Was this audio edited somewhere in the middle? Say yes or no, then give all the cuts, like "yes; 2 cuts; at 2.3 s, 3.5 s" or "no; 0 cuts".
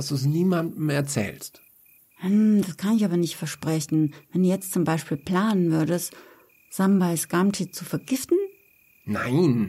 no; 0 cuts